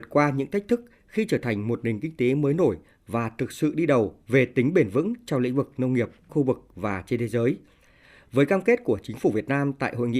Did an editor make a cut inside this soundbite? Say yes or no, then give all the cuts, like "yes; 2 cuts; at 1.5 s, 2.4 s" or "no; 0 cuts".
no; 0 cuts